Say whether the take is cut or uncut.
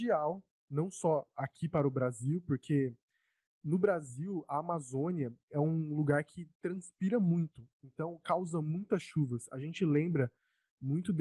uncut